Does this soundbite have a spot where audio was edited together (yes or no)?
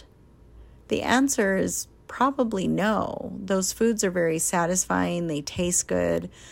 no